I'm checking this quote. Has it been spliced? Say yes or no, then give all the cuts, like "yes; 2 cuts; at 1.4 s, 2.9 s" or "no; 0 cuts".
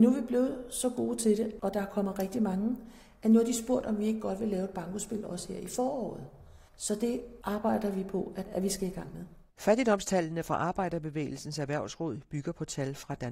yes; 3 cuts; at 6.7 s, 8.5 s, 9.5 s